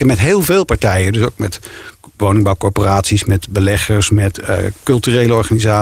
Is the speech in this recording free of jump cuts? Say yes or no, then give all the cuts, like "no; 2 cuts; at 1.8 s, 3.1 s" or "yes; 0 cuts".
yes; 0 cuts